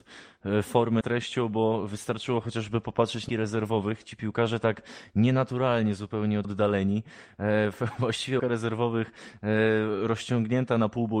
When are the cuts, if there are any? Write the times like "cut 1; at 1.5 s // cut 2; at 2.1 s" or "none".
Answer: cut 1; at 1.0 s // cut 2; at 3.3 s // cut 3; at 6.4 s // cut 4; at 8.4 s